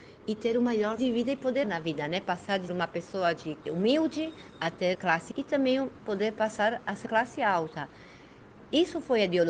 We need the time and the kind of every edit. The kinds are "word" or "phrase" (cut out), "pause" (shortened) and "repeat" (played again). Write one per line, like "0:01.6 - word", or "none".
0:01.0 - word
0:01.6 - word
0:02.7 - word
0:03.6 - word
0:04.9 - word
0:05.3 - word
0:07.1 - word